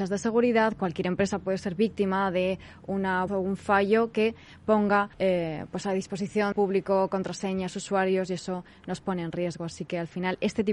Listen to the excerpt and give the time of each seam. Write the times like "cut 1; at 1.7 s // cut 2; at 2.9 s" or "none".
cut 1; at 3.3 s // cut 2; at 5.1 s // cut 3; at 6.5 s